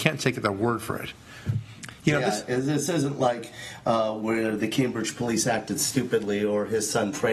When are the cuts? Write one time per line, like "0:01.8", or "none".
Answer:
none